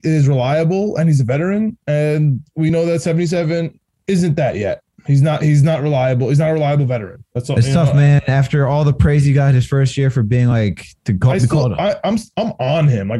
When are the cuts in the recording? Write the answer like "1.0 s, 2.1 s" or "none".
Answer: none